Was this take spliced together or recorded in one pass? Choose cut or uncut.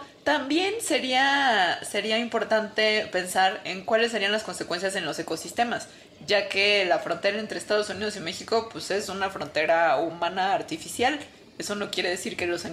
uncut